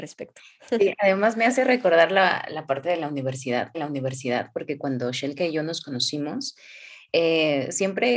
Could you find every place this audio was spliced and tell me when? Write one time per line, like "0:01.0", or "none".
0:03.7